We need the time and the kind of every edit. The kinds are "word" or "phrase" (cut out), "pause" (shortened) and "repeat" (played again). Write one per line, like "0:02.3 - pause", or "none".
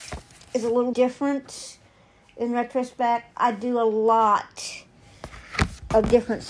0:00.9 - word
0:03.3 - word